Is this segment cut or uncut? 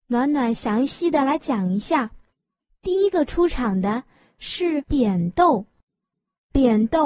uncut